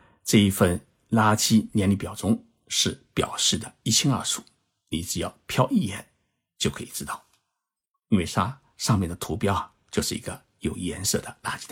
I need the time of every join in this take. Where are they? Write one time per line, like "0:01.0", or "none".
none